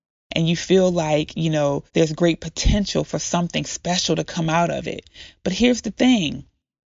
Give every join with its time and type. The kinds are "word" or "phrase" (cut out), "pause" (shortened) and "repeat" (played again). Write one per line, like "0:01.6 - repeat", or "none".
0:01.9 - pause